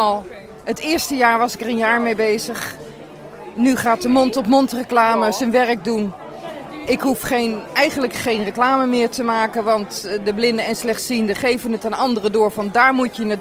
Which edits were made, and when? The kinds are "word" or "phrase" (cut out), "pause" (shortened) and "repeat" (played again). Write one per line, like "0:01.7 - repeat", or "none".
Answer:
none